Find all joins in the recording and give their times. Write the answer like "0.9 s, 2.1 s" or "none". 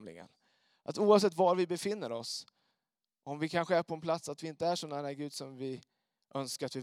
none